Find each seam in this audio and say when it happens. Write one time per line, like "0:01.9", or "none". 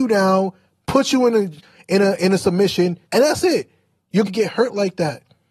0:03.1
0:04.3